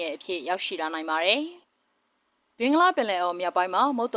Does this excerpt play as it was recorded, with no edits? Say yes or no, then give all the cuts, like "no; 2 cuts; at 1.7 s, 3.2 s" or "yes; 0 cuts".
no; 1 cut; at 1.6 s